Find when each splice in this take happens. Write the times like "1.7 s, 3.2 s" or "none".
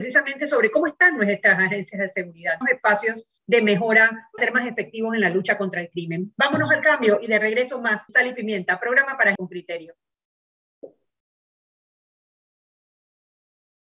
2.6 s, 3.4 s, 4.4 s, 8.1 s, 9.4 s